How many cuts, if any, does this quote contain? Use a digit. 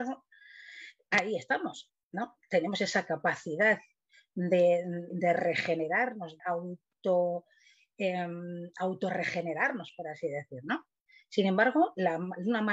2